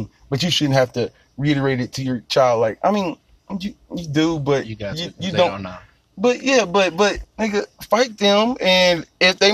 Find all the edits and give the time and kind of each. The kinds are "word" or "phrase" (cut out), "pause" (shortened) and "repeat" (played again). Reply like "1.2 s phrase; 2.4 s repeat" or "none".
7.2 s phrase